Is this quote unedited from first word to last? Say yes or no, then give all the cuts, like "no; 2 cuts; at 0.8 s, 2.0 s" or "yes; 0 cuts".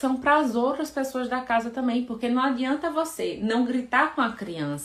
yes; 0 cuts